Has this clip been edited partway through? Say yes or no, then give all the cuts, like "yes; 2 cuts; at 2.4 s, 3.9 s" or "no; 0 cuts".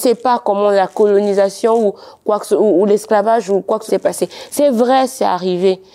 yes; 1 cut; at 3.9 s